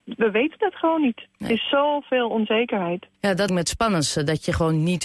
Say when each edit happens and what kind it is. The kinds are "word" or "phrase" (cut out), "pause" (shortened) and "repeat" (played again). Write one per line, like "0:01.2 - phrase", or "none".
0:01.3 - pause
0:03.1 - pause
0:03.5 - word